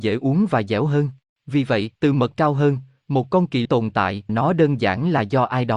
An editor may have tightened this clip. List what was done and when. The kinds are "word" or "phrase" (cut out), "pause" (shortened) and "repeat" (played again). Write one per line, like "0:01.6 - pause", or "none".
0:01.2 - pause
0:01.9 - pause
0:02.3 - word
0:03.6 - word
0:04.3 - word